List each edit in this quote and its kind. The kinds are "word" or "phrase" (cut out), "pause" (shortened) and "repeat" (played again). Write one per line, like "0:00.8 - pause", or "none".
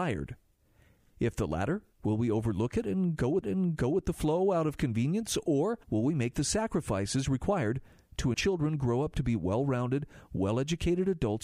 0:01.9 - pause
0:03.4 - repeat
0:05.8 - pause
0:08.3 - phrase